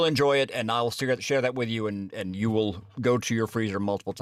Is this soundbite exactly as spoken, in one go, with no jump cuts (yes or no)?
yes